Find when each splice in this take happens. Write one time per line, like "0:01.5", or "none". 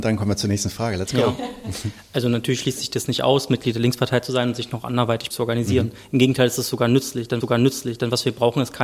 0:05.3
0:07.4